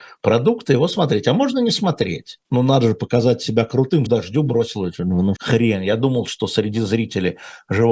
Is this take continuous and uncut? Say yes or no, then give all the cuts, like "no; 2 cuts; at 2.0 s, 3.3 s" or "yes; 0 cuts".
no; 3 cuts; at 2.4 s, 4.1 s, 5.4 s